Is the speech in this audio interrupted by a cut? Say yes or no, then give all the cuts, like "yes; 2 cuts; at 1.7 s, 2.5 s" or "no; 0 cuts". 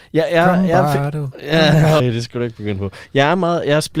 yes; 1 cut; at 2.0 s